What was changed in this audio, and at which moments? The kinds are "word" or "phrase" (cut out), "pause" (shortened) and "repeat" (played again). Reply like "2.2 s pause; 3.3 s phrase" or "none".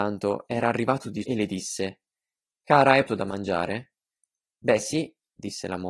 1.2 s word; 3.1 s word

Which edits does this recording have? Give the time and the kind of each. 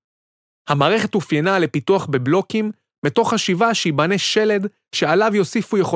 none

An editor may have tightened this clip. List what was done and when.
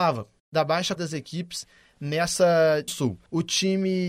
1.0 s word; 2.9 s word

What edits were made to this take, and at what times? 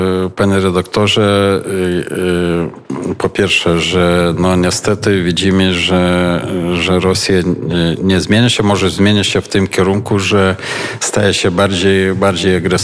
none

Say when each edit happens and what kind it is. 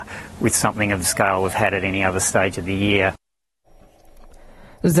1.0 s word

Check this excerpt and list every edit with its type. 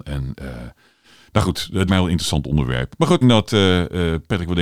1.9 s word; 3.2 s word

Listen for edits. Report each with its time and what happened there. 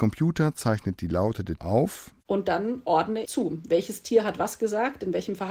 1.6 s word; 2.2 s pause; 3.2 s word

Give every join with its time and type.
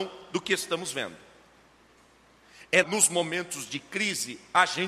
2.8 s word

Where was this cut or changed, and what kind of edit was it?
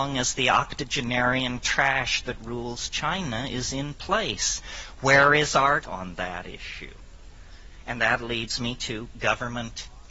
5.8 s word

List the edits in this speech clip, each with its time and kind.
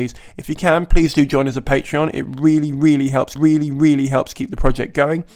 3.4 s repeat

